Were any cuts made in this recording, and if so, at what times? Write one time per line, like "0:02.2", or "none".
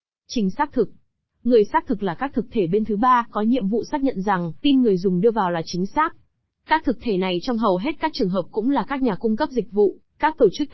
0:04.6

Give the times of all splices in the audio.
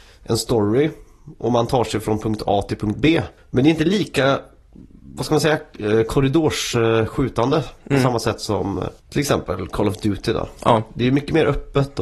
0:03.4
0:09.0

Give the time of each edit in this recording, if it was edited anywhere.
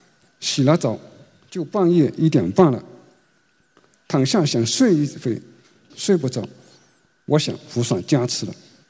0:05.9

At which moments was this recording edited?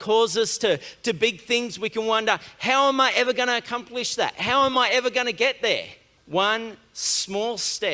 0:06.2

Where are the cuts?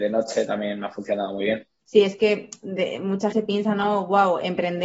0:03.3

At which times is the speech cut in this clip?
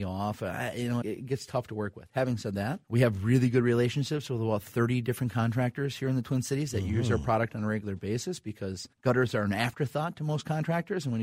0:01.0
0:02.8
0:08.9

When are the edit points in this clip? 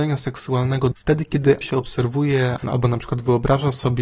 0:00.9
0:01.6
0:02.6

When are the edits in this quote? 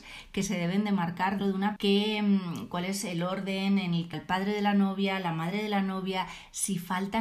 0:01.4
0:01.8
0:04.1

